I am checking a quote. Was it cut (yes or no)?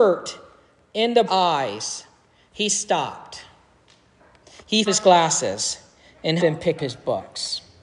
yes